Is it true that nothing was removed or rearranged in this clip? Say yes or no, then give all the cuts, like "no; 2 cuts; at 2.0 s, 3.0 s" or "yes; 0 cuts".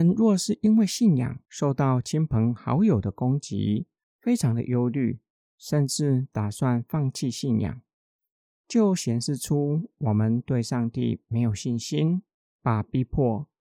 yes; 0 cuts